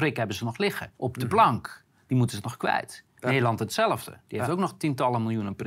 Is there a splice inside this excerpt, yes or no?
yes